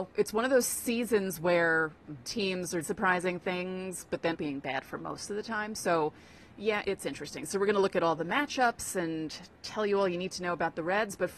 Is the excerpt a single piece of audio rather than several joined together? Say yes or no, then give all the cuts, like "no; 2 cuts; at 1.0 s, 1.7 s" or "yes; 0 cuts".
no; 4 cuts; at 2.2 s, 2.8 s, 4.3 s, 6.8 s